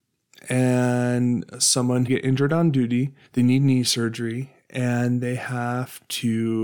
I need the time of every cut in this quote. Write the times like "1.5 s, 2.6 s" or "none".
2.1 s, 3.3 s